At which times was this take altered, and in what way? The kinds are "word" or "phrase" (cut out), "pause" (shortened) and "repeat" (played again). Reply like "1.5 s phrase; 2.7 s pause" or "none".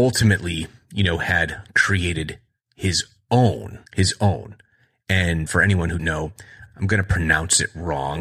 3.9 s pause; 5.5 s word; 6.0 s word; 6.7 s word